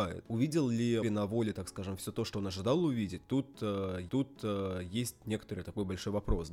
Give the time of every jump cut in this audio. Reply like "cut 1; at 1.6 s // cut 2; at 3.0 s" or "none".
cut 1; at 1.0 s // cut 2; at 4.1 s